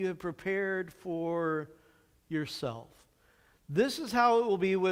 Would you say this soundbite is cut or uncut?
uncut